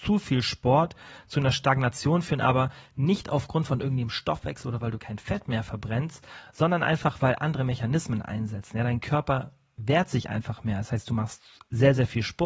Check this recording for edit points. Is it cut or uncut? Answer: uncut